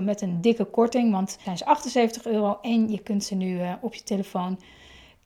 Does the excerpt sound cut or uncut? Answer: cut